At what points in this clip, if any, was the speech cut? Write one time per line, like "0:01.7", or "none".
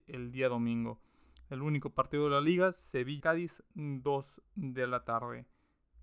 0:03.2
0:04.4